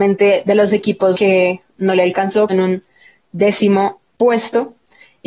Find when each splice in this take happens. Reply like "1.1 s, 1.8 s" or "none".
1.1 s, 1.8 s, 2.5 s